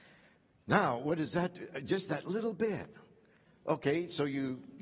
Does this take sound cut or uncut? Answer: uncut